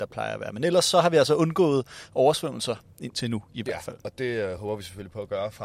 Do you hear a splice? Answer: no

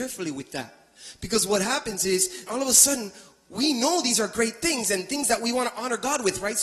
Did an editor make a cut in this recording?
yes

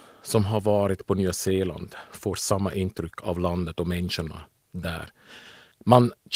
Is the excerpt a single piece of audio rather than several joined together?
yes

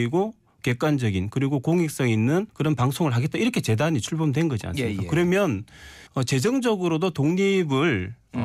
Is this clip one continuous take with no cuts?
no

